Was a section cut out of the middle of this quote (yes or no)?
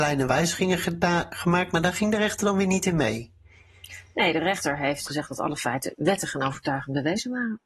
no